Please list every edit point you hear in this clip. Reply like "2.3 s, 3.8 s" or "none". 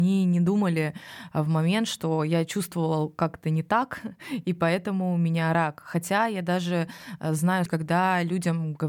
7.7 s